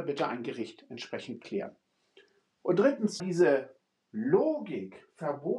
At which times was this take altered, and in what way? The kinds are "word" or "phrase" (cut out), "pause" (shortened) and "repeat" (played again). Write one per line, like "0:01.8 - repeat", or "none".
0:03.2 - word